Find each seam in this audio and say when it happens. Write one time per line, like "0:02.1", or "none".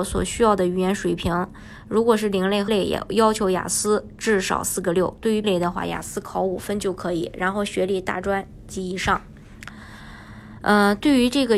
0:02.7
0:05.4